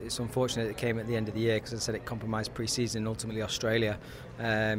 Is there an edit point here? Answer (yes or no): no